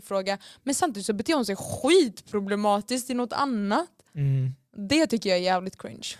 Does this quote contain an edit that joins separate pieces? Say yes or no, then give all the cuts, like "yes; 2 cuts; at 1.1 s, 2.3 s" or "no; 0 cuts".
no; 0 cuts